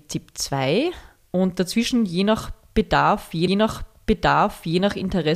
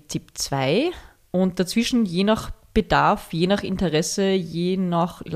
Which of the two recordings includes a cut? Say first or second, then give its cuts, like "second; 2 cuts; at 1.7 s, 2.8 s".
first; 1 cut; at 3.5 s